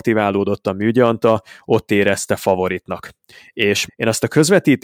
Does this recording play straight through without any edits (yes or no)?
no